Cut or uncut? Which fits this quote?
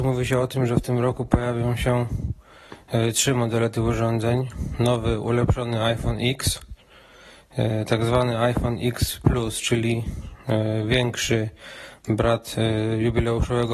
uncut